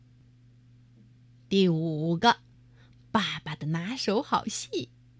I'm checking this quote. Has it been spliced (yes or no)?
no